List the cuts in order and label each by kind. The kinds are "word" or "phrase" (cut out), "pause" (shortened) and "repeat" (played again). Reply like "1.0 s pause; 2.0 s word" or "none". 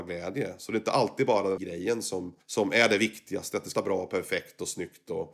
1.6 s word; 2.4 s pause; 3.7 s word